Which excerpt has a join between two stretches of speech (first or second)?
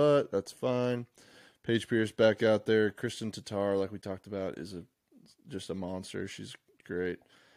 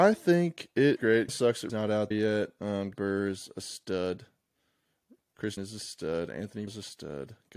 second